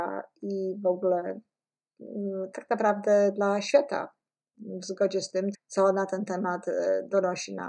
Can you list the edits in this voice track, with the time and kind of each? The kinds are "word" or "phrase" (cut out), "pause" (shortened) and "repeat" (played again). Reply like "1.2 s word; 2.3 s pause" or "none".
5.5 s word

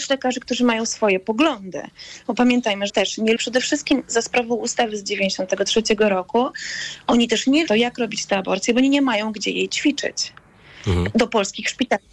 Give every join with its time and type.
2.9 s word; 3.4 s phrase; 7.7 s phrase

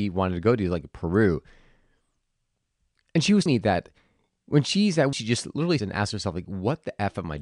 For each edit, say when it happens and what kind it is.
3.5 s word; 5.1 s phrase; 5.8 s word

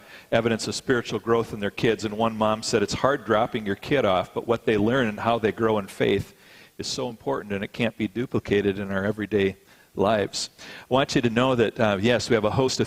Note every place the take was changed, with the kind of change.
none

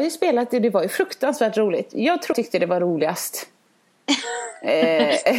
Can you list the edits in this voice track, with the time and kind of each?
2.3 s word

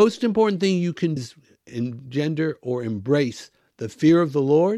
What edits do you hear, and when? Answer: 1.2 s word

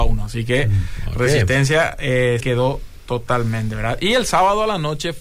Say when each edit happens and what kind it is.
2.4 s word

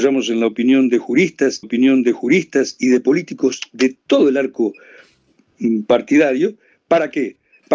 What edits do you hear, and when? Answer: 1.6 s repeat

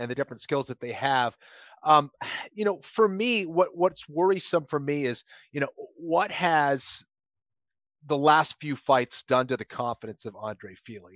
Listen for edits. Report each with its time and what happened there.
none

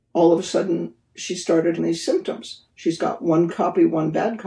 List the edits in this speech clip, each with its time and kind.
1.8 s word; 2.7 s pause; 3.5 s word

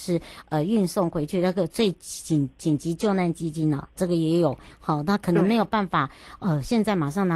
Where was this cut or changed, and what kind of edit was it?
4.0 s phrase

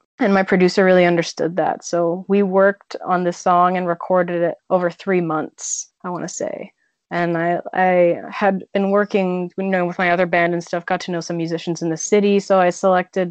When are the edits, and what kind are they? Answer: none

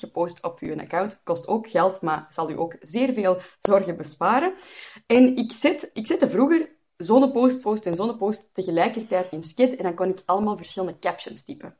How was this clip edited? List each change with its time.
7.6 s word

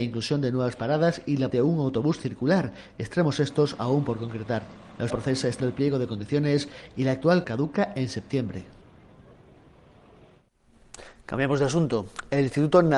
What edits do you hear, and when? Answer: 1.5 s word; 5.1 s word; 5.6 s word; 7.4 s word

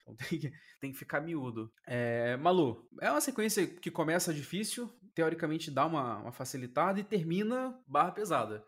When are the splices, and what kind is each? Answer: none

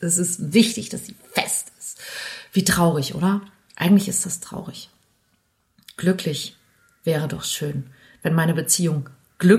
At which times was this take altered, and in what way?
none

